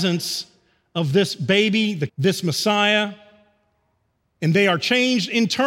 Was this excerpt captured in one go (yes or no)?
no